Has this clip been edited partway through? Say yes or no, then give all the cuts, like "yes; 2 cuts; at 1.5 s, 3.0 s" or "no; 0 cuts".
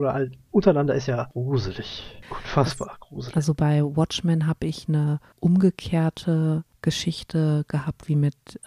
no; 0 cuts